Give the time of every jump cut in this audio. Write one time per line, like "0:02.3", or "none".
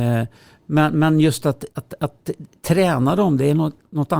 0:01.7

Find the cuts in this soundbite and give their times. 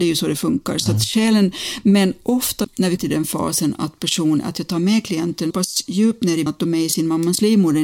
0:02.6
0:03.0
0:05.5
0:06.5

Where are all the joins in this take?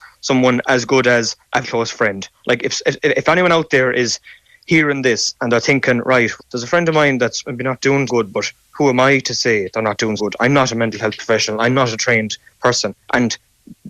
0:01.6
0:06.4
0:08.1
0:10.2

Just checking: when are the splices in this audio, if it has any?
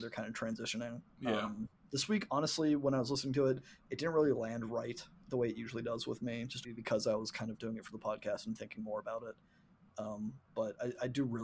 0:01.1
0:06.6

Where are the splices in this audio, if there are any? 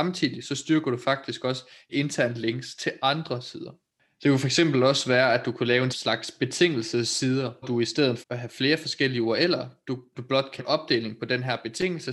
0:01.9
0:05.9
0:07.6
0:08.2
0:10.1
0:10.6

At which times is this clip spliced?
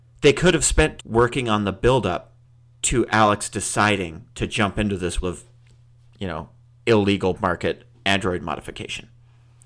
0:01.0
0:02.5
0:04.3
0:05.2
0:07.3

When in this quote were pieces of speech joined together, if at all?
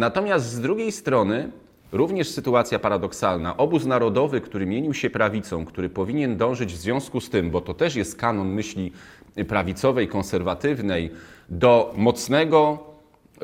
none

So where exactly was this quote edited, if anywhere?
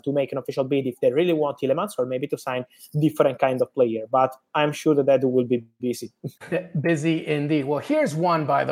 0:06.4

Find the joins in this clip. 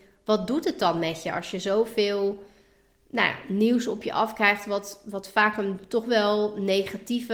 none

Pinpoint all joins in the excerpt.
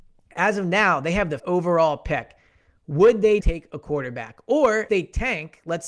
0:01.4
0:03.4
0:04.9

